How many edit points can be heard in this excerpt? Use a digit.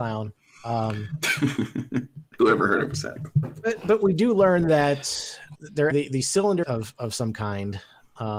3